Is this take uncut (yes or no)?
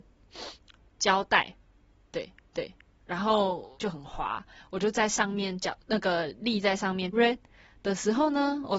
no